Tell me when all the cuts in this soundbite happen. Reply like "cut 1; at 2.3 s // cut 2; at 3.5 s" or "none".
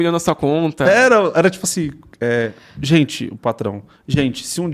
none